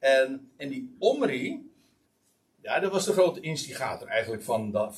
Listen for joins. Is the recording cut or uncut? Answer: cut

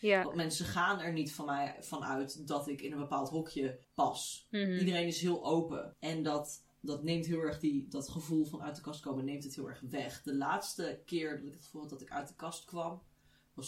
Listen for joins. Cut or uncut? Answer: cut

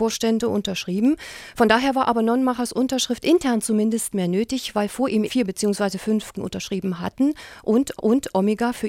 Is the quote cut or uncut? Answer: cut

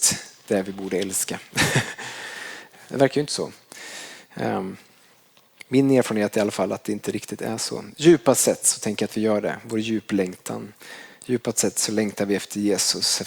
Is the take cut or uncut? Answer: uncut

